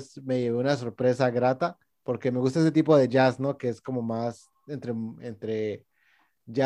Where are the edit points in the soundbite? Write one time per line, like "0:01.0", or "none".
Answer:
0:01.9